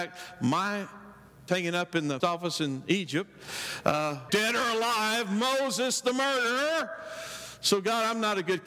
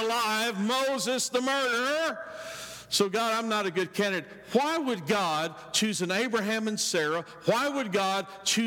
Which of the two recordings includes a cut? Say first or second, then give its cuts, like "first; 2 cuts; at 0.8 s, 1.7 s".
first; 3 cuts; at 1.5 s, 2.2 s, 4.3 s